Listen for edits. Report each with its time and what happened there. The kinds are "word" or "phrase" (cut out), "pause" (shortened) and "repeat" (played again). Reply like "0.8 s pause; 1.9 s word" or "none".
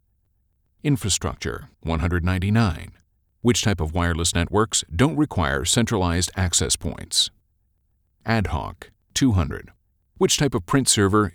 1.7 s pause; 9.0 s pause